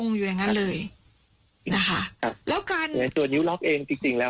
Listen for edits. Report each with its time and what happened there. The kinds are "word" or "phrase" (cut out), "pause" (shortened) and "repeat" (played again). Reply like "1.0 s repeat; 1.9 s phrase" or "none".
2.4 s pause